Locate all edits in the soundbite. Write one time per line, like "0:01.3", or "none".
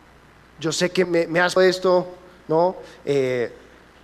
0:01.0
0:01.6